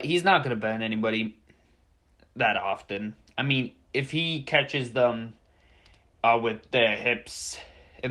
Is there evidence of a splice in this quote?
no; 0 cuts

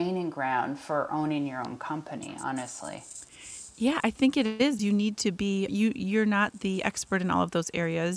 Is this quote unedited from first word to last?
no; 2 cuts; at 4.8 s, 5.7 s

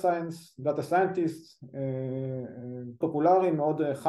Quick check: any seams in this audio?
yes; 1 cut; at 3.0 s

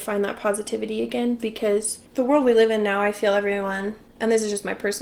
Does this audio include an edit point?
yes; 1 cut; at 2.1 s

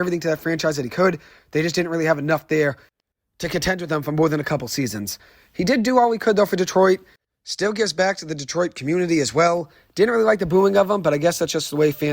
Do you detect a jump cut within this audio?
no; 0 cuts

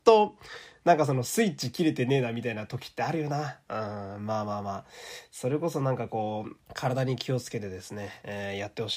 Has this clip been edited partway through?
yes; 1 cut; at 6.6 s

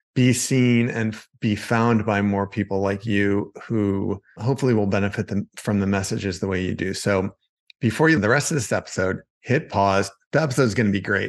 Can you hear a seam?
yes; 1 cut; at 8.2 s

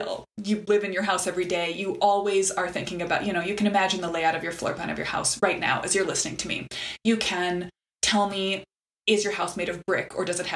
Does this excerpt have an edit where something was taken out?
no; 0 cuts

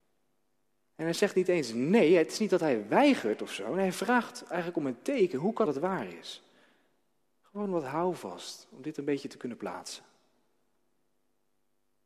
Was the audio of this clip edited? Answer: yes; 1 cut; at 5.7 s

